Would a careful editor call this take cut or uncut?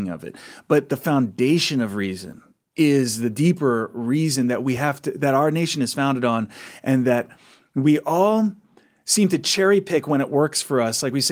uncut